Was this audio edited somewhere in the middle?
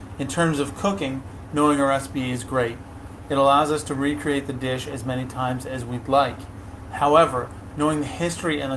no; 0 cuts

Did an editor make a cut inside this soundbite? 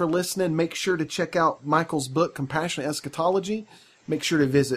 no; 0 cuts

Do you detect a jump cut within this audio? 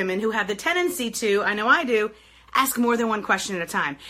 no; 0 cuts

